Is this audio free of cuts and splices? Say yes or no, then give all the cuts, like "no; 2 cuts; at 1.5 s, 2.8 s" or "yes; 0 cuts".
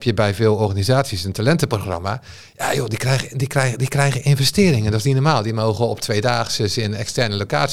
yes; 0 cuts